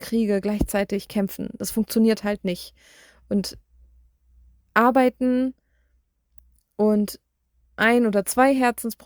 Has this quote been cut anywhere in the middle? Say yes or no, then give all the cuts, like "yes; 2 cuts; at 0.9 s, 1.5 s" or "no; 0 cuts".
no; 0 cuts